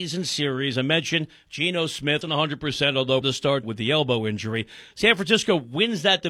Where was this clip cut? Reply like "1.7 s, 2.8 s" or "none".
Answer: 2.2 s, 3.2 s, 3.6 s